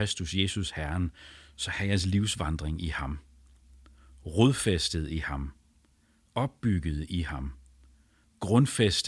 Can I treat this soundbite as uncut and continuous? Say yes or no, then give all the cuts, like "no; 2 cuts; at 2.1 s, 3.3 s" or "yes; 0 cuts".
yes; 0 cuts